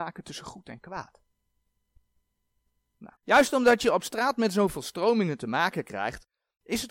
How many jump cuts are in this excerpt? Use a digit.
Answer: 1